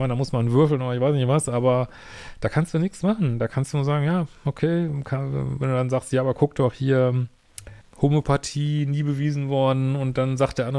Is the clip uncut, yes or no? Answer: no